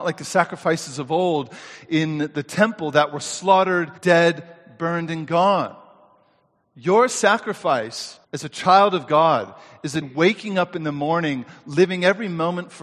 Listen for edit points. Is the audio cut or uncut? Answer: cut